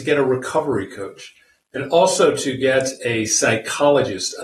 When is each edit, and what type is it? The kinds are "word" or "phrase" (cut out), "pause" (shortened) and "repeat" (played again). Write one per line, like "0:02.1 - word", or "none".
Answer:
none